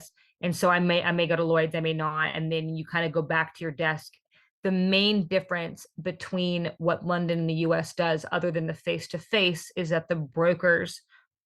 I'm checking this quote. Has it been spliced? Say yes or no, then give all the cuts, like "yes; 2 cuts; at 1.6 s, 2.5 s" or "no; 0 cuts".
no; 0 cuts